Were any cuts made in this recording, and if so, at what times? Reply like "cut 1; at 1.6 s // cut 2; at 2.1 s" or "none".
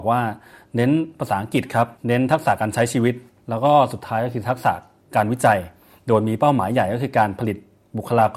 cut 1; at 2.0 s